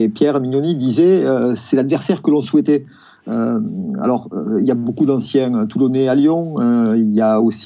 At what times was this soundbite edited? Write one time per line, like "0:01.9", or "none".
none